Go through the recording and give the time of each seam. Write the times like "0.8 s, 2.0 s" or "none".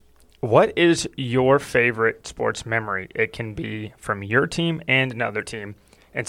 2.2 s